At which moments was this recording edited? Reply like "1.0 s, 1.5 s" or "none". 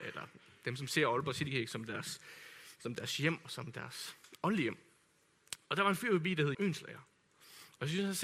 6.5 s